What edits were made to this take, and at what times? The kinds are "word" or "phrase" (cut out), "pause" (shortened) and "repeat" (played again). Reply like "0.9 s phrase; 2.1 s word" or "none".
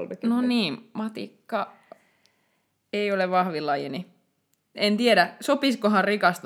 none